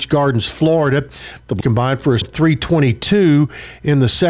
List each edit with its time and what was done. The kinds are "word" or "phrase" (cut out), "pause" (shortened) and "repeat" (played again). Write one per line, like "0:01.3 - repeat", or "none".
0:01.6 - word
0:02.2 - word